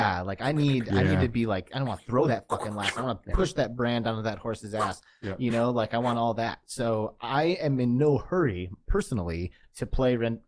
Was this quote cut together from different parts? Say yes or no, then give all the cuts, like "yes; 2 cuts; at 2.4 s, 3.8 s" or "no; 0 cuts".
no; 0 cuts